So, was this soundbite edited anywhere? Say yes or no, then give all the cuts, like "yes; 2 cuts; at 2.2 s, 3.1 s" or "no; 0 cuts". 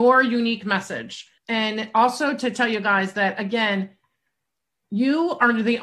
yes; 1 cut; at 1.4 s